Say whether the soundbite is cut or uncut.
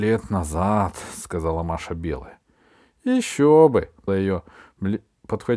cut